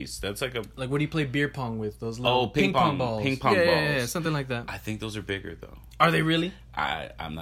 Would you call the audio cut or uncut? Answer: uncut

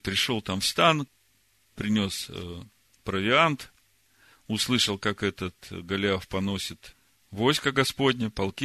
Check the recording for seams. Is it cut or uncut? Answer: uncut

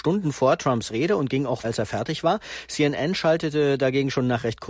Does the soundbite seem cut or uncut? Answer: cut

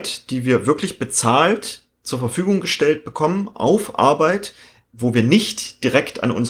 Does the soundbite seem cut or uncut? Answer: uncut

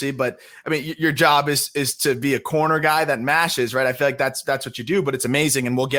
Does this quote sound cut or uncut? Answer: uncut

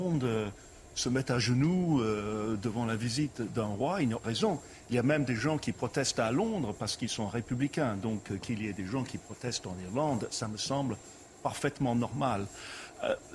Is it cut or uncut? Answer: cut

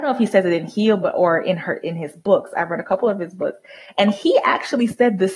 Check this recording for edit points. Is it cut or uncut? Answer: uncut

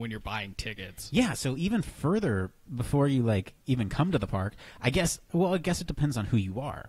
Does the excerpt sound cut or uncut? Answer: uncut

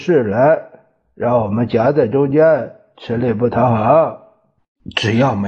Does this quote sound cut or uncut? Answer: uncut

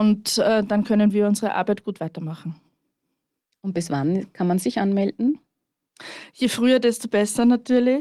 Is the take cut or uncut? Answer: uncut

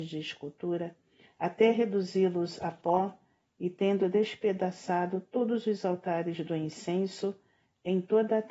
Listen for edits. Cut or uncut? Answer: uncut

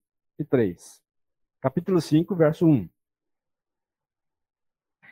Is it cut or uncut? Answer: uncut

